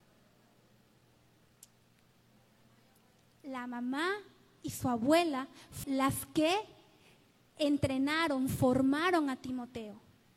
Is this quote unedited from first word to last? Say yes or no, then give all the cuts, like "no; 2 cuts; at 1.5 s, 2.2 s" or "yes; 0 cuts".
no; 1 cut; at 5.8 s